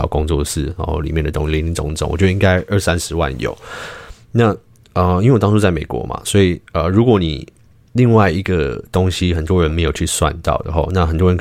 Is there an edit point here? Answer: no; 0 cuts

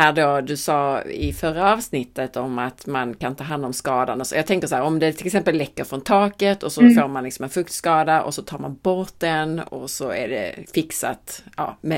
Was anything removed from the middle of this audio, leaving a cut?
no; 0 cuts

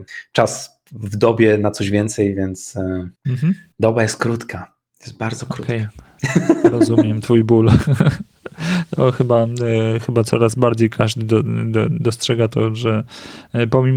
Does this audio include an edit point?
yes; 1 cut; at 3.2 s

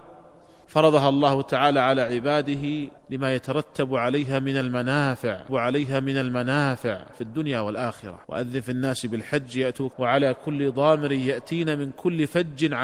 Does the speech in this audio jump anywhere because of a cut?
yes; 4 cuts; at 3.0 s, 5.5 s, 8.2 s, 9.9 s

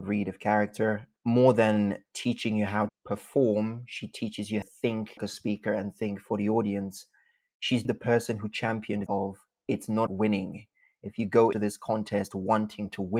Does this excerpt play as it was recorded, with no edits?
no; 8 cuts; at 1.2 s, 2.9 s, 4.6 s, 5.2 s, 7.8 s, 9.1 s, 10.1 s, 11.5 s

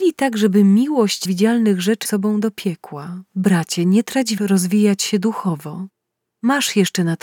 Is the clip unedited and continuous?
no; 4 cuts; at 1.2 s, 2.0 s, 3.3 s, 4.4 s

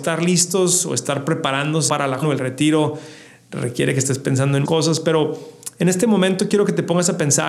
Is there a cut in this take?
yes; 3 cuts; at 1.9 s, 2.2 s, 4.6 s

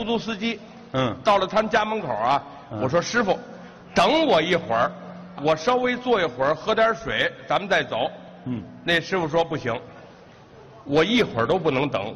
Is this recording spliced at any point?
yes; 1 cut; at 5.4 s

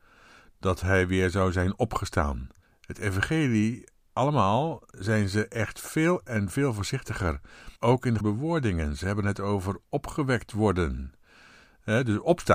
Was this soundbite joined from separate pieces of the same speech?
yes; 3 cuts; at 2.6 s, 7.8 s, 8.2 s

